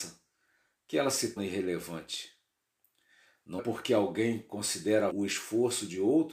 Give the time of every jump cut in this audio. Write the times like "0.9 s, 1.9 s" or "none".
1.4 s, 3.6 s, 5.1 s